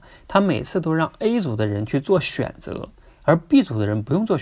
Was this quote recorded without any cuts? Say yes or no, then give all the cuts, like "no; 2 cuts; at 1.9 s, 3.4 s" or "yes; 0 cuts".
yes; 0 cuts